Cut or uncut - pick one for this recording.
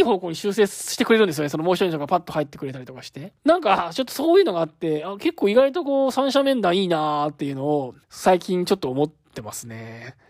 cut